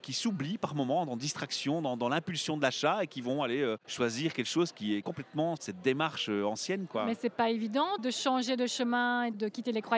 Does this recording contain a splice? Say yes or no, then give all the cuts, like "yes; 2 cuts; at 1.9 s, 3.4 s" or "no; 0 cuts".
yes; 1 cut; at 3.8 s